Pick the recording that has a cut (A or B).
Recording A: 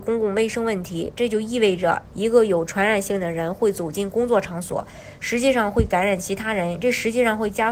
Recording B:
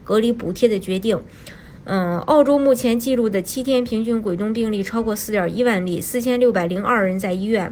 A